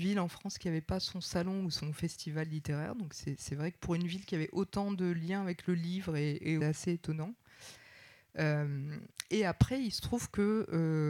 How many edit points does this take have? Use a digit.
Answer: 1